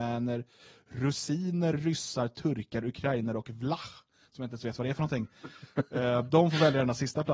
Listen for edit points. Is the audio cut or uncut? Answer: uncut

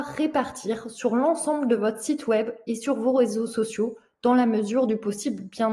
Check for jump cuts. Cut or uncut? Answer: uncut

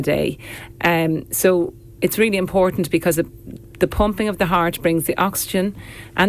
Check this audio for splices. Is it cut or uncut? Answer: uncut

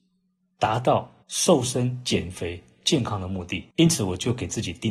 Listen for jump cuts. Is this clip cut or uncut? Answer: cut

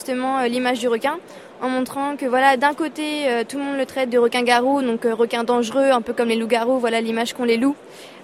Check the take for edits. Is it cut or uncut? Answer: uncut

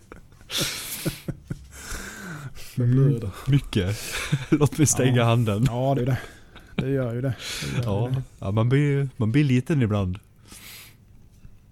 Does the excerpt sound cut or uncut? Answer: cut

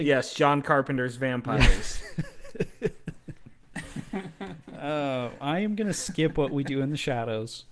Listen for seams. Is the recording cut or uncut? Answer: cut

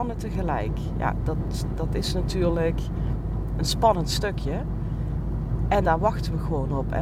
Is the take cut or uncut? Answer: cut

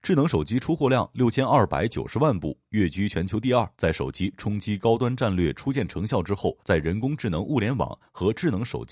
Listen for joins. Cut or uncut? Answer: cut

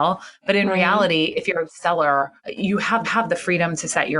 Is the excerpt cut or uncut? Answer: cut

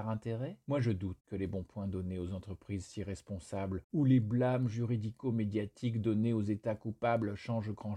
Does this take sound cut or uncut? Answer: uncut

